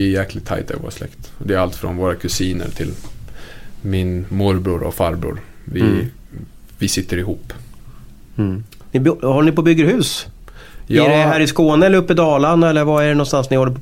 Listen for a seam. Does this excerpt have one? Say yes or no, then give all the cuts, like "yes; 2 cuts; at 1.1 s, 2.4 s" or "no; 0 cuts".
no; 0 cuts